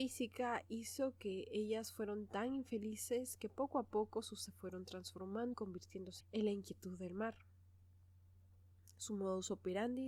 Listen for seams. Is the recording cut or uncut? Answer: cut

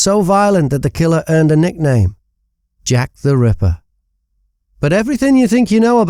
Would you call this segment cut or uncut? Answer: uncut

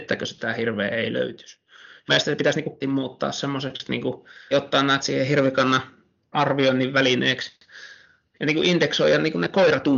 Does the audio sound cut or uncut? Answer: cut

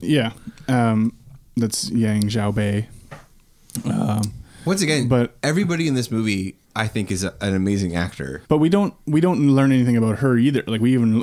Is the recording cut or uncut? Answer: cut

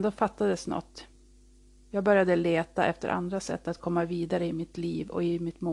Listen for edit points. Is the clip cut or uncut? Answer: uncut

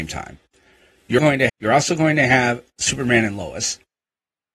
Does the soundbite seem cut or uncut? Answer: cut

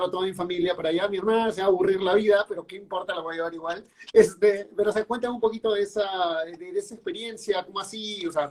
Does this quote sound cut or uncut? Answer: uncut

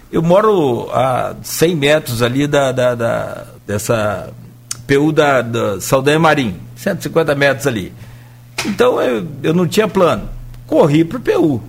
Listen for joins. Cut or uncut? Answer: cut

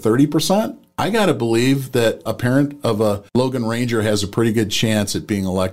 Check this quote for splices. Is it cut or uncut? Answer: cut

